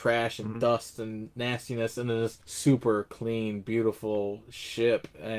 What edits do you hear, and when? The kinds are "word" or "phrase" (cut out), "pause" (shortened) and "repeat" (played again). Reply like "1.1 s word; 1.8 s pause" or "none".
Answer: 2.4 s pause